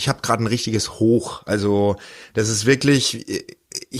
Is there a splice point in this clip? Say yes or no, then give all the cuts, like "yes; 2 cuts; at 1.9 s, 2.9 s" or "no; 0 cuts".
no; 0 cuts